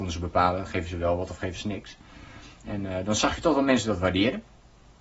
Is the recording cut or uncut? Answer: uncut